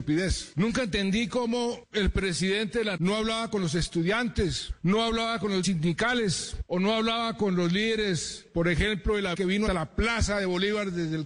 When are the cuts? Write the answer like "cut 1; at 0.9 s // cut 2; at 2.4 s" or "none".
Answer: cut 1; at 3.0 s // cut 2; at 5.6 s // cut 3; at 9.3 s // cut 4; at 9.7 s